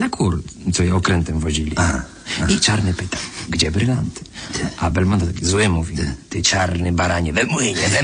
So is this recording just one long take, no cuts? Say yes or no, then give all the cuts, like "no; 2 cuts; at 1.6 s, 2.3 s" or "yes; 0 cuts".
yes; 0 cuts